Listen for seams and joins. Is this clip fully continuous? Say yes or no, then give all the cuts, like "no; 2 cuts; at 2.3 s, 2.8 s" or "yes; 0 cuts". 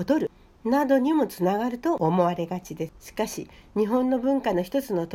yes; 0 cuts